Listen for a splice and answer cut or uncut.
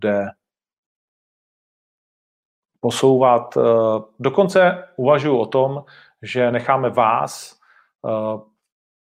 uncut